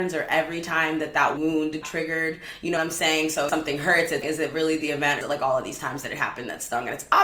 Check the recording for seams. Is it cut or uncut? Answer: cut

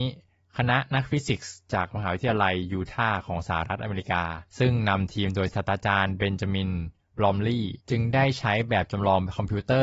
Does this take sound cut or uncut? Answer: cut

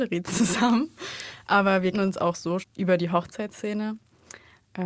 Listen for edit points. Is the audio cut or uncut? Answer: cut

